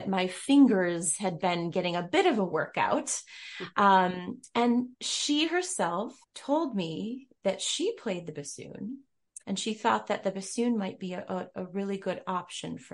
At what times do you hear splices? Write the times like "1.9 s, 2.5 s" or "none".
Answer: 4.9 s, 6.2 s, 9.4 s